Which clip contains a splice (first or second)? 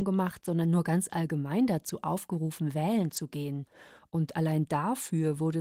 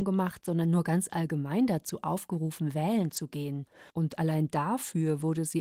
second